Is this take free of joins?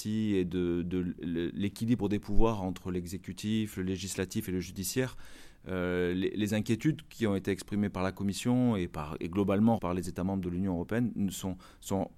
no; 1 cut; at 9.8 s

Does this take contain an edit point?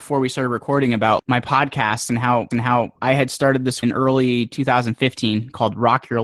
yes; 3 cuts; at 1.2 s, 2.5 s, 3.8 s

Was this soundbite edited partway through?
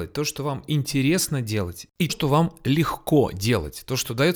yes; 1 cut; at 2.1 s

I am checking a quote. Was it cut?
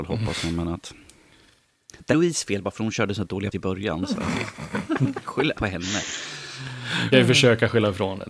yes; 4 cuts; at 2.1 s, 3.5 s, 5.5 s, 7.1 s

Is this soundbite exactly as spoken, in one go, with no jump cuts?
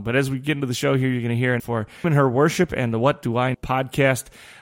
no; 3 cuts; at 1.6 s, 2.0 s, 3.5 s

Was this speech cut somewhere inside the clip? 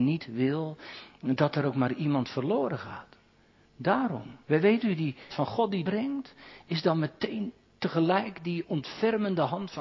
yes; 3 cuts; at 4.4 s, 5.3 s, 5.8 s

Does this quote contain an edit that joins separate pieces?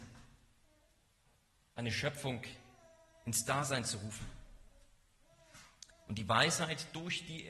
no; 0 cuts

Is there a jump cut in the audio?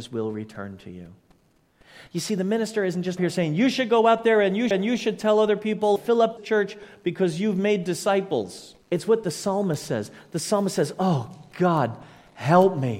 yes; 5 cuts; at 3.2 s, 4.7 s, 6.0 s, 6.4 s, 8.8 s

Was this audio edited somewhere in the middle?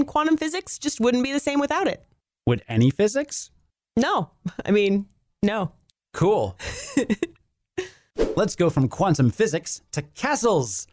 no; 0 cuts

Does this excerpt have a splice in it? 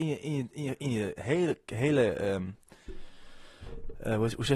no; 0 cuts

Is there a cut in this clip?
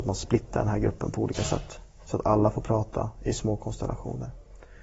no; 0 cuts

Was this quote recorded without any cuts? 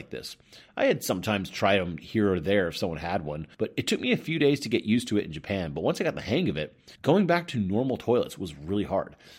no; 2 cuts; at 3.5 s, 7.0 s

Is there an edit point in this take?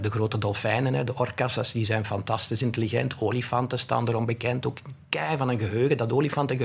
no; 0 cuts

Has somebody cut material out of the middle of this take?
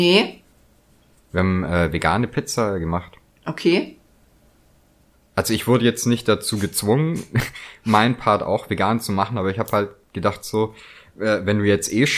no; 0 cuts

